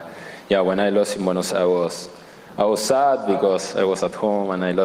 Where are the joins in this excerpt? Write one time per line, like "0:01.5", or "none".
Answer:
0:01.5